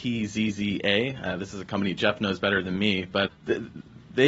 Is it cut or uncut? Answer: cut